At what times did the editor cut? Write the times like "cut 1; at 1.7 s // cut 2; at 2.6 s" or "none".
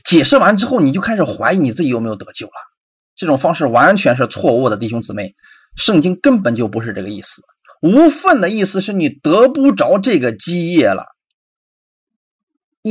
none